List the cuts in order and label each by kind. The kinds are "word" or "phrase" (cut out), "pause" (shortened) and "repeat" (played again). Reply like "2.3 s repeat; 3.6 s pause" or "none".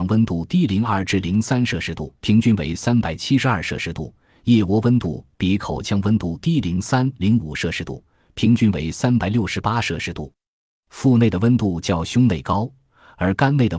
2.2 s pause